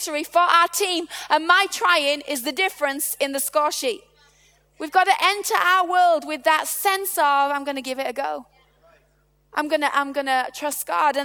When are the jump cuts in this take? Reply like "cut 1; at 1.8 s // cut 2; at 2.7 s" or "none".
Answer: none